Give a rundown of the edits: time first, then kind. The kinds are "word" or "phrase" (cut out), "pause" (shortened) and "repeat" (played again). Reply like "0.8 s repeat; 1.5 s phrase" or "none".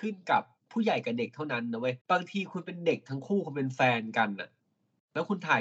2.0 s pause